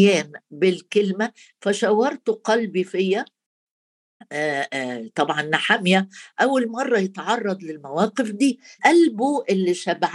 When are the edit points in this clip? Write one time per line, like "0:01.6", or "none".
0:08.8